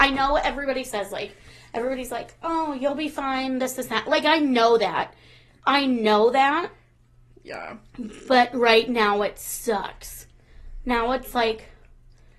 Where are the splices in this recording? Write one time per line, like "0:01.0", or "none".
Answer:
none